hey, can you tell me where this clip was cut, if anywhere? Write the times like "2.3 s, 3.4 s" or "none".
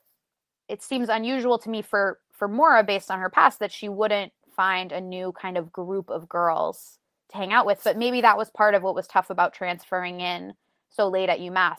none